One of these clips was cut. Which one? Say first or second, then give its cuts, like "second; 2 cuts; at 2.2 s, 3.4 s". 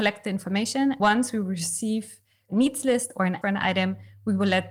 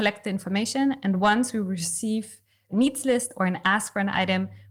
first; 2 cuts; at 1.0 s, 3.4 s